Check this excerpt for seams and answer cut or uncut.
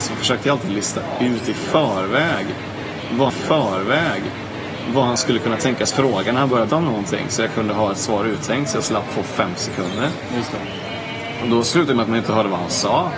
cut